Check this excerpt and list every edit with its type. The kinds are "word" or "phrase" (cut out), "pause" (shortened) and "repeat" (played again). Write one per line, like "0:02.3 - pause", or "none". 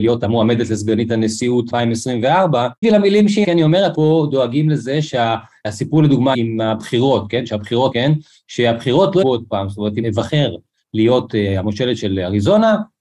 0:01.7 - word
0:02.8 - word
0:03.4 - word
0:03.9 - word
0:06.3 - word
0:07.9 - word
0:09.2 - word
0:10.0 - word

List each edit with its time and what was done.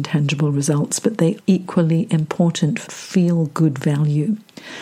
0:01.4 - word
0:02.9 - word

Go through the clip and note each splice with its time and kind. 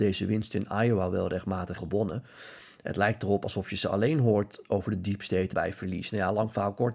0:01.7 - word
0:05.5 - phrase

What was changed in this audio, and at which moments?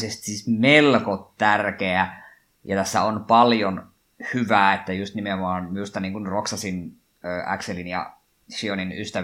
none

